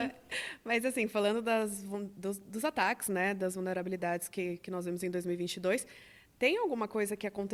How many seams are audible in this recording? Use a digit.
0